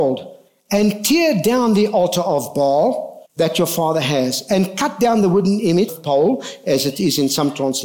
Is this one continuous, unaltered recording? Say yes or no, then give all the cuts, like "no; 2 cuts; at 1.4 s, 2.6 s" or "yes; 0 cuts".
no; 2 cuts; at 3.2 s, 5.9 s